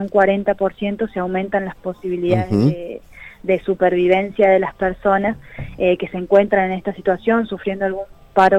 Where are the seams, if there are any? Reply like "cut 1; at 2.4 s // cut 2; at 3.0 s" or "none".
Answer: none